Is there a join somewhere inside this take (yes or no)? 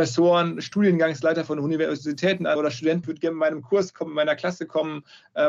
yes